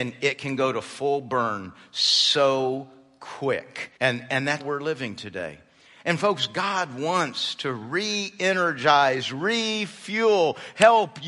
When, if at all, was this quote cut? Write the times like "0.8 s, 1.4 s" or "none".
4.0 s, 4.6 s